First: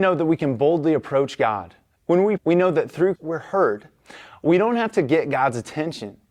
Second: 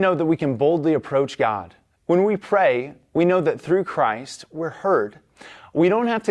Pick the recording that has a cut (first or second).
first